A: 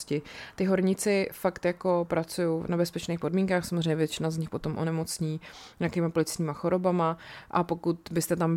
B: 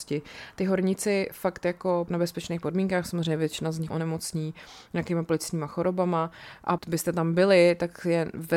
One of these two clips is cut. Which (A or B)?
B